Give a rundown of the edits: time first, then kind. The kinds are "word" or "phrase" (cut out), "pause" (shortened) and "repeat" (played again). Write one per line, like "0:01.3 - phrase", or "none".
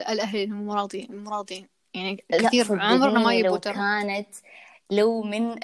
none